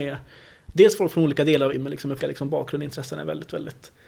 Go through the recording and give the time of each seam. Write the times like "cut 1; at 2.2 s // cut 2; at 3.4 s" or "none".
cut 1; at 1.7 s // cut 2; at 2.2 s